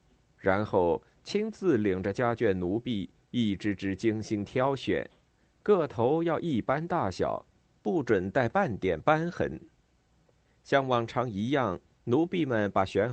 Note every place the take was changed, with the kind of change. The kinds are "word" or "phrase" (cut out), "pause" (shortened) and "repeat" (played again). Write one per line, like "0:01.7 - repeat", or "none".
none